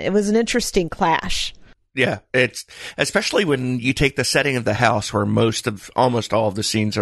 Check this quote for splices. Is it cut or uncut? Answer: uncut